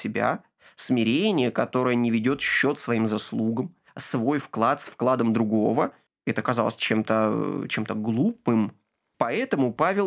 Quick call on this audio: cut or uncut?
cut